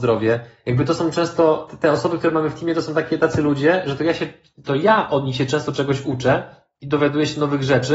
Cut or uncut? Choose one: uncut